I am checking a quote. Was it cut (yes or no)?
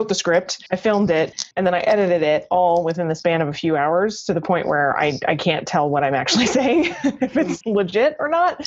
no